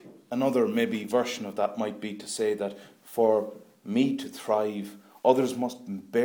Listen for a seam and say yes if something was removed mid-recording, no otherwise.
no